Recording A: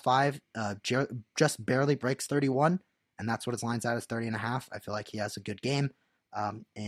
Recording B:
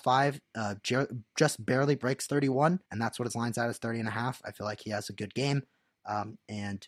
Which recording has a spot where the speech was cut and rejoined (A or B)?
B